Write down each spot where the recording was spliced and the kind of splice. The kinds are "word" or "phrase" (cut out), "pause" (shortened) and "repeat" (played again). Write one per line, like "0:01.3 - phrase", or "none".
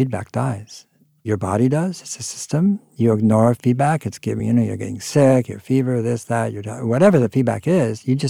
none